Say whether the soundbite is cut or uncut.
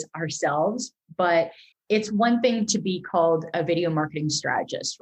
cut